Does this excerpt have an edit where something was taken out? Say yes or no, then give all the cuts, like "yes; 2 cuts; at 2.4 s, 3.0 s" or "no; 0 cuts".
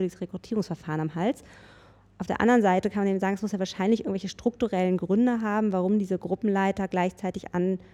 no; 0 cuts